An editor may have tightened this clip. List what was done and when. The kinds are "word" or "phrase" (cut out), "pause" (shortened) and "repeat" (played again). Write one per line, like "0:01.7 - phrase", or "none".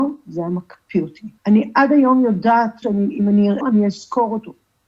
0:01.4 - pause
0:02.8 - word
0:03.6 - word